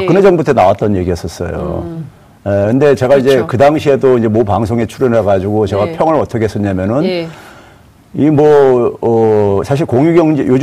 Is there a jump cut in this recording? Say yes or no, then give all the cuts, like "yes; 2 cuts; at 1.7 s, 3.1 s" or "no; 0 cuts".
no; 0 cuts